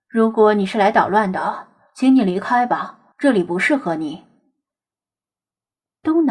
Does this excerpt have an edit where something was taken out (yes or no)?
yes